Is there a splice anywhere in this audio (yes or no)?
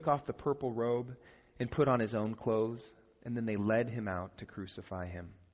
no